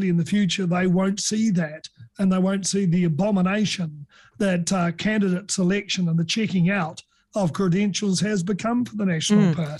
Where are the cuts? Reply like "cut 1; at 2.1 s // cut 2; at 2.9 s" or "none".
none